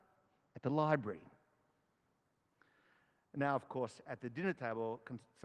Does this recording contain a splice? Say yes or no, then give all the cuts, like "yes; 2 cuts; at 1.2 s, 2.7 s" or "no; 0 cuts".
no; 0 cuts